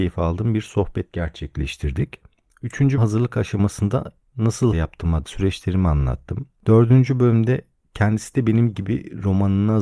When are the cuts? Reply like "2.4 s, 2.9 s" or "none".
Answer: 3.0 s, 4.7 s, 5.2 s